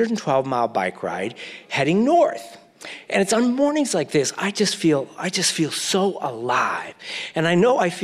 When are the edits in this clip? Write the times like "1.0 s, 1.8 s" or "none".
none